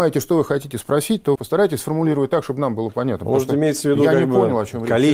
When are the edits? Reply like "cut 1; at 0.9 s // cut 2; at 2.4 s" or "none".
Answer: cut 1; at 1.4 s